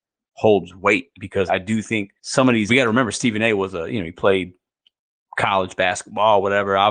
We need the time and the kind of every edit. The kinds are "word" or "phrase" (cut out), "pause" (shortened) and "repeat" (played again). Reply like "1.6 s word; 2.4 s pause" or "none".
1.5 s word; 2.2 s pause; 2.7 s phrase